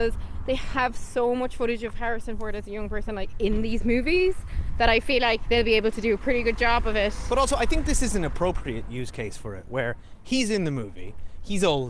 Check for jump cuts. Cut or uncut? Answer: uncut